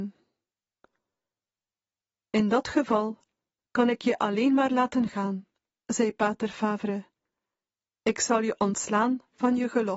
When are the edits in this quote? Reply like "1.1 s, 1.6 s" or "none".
none